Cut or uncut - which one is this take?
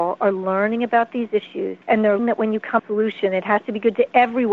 cut